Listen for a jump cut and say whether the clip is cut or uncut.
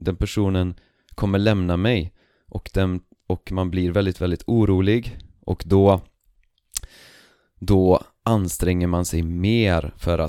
uncut